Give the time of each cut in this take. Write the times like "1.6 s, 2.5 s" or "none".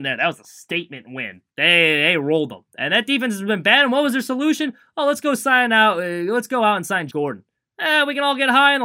1.5 s, 2.7 s, 7.1 s